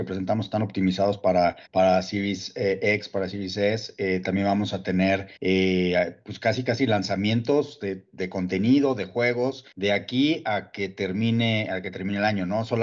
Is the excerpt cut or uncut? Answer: cut